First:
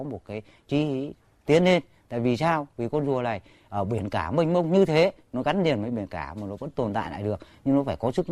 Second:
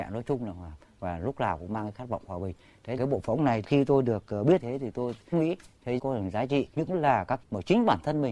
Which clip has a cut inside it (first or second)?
second